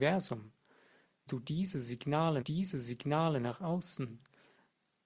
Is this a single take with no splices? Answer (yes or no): no